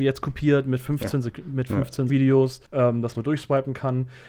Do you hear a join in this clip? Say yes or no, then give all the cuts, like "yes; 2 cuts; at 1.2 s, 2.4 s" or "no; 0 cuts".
yes; 3 cuts; at 2.1 s, 2.7 s, 3.1 s